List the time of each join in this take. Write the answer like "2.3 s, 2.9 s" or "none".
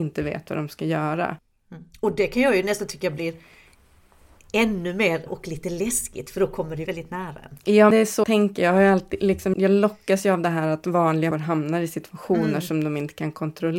5.3 s, 6.9 s, 7.9 s, 8.2 s, 9.5 s, 11.3 s